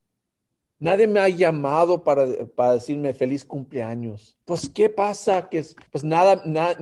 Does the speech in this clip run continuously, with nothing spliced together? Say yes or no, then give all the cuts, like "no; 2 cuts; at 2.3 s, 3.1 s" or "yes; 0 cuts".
no; 2 cuts; at 4.4 s, 5.9 s